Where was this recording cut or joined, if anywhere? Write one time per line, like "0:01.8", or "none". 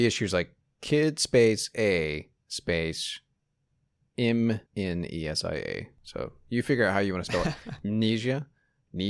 0:04.7
0:06.0